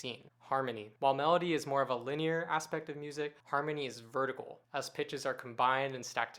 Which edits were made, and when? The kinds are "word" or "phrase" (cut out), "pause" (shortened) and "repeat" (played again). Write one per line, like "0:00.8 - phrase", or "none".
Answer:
0:01.0 - pause
0:03.4 - pause
0:04.6 - pause